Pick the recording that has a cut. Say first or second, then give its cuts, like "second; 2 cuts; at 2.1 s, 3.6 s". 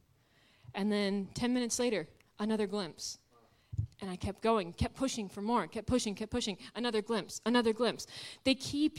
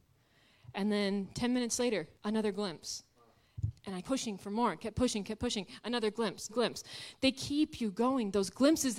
second; 3 cuts; at 2.1 s, 4.0 s, 6.5 s